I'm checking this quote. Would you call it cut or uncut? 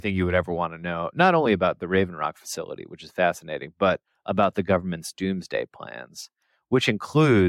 uncut